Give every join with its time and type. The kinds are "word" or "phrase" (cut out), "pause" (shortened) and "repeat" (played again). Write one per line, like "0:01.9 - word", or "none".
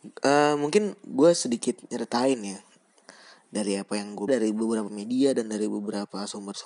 0:04.3 - word